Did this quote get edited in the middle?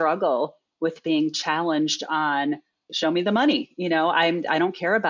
no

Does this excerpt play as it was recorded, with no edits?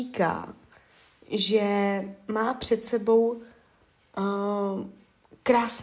yes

